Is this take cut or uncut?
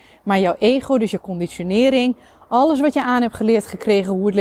uncut